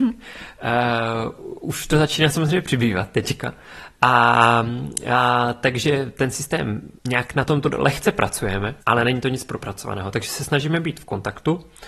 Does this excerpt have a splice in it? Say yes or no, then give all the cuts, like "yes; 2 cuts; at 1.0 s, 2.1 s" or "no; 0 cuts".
yes; 2 cuts; at 7.0 s, 8.8 s